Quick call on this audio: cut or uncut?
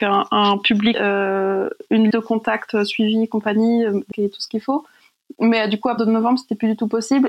cut